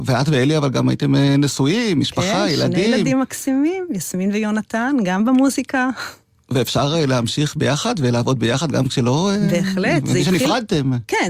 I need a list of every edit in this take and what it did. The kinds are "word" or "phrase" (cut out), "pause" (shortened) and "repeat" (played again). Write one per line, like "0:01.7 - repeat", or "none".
none